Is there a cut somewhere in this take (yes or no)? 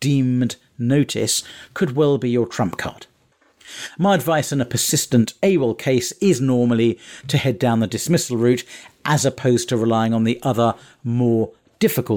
no